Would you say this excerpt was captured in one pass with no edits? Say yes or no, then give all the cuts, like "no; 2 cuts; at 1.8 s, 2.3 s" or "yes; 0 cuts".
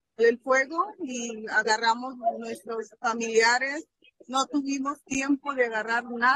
yes; 0 cuts